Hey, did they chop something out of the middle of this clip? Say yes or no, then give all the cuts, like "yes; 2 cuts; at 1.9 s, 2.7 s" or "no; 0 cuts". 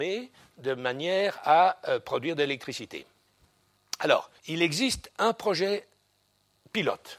yes; 1 cut; at 4.4 s